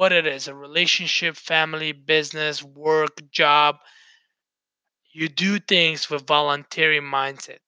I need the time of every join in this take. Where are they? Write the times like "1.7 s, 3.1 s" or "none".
none